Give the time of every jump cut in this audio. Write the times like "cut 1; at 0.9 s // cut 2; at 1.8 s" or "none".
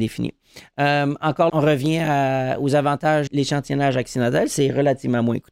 cut 1; at 1.5 s // cut 2; at 3.3 s